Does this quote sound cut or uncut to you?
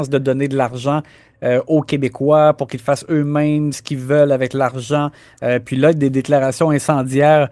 uncut